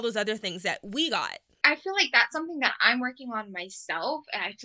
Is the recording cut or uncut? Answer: uncut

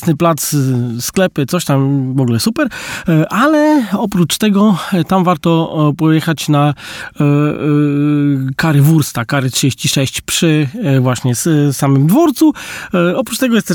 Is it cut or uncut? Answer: uncut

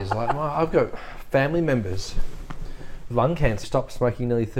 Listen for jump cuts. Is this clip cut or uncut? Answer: cut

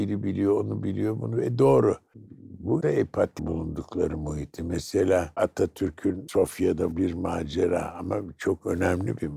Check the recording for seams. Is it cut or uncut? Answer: cut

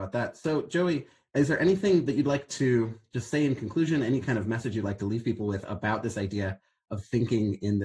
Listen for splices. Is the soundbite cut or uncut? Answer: uncut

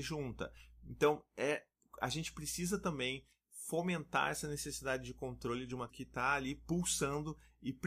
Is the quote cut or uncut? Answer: cut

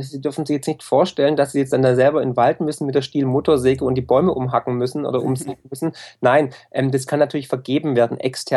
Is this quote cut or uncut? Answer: uncut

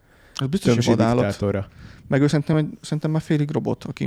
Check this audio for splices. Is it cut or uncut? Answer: uncut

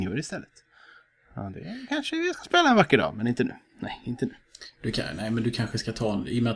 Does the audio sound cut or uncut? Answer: uncut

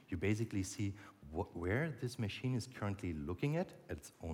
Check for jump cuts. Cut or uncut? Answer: uncut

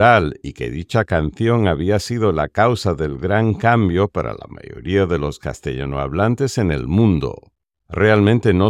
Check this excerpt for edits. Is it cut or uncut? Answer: uncut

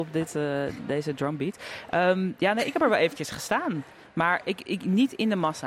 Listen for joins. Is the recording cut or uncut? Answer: uncut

